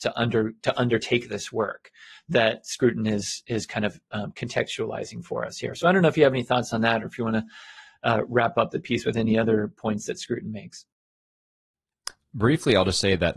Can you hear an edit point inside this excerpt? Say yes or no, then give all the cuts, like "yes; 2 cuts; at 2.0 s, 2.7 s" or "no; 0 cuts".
no; 0 cuts